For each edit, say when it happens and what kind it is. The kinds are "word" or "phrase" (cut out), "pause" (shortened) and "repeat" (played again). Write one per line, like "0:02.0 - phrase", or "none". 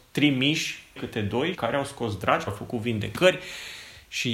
0:01.0 - word
0:01.5 - word
0:02.5 - word